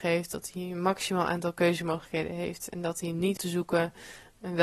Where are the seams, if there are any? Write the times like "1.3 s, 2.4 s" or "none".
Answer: 3.4 s